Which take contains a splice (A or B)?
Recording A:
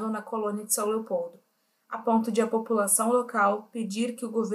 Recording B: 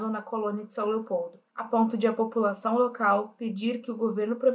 B